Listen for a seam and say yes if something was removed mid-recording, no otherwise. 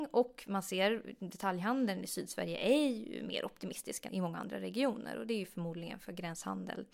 yes